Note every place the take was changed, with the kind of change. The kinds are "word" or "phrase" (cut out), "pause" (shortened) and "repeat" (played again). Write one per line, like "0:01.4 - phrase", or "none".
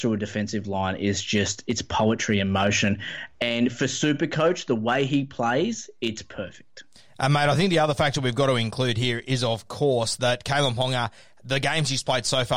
none